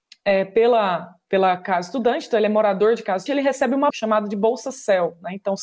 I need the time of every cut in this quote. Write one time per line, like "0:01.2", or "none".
0:03.3
0:03.9